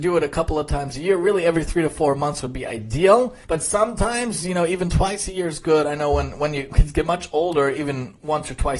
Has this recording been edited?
yes; 1 cut; at 3.4 s

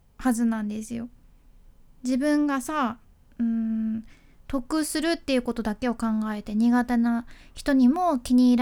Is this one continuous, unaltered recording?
yes; 0 cuts

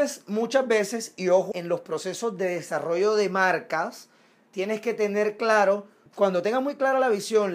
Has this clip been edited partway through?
yes; 2 cuts; at 1.5 s, 6.1 s

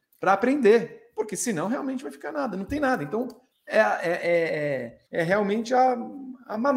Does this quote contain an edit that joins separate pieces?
yes; 2 cuts; at 3.5 s, 5.1 s

